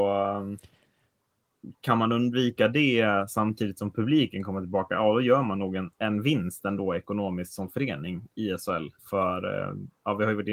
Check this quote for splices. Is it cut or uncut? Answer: cut